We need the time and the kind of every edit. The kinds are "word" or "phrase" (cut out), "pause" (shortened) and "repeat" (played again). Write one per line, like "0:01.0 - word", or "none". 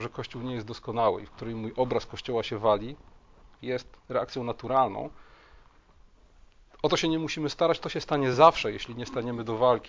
none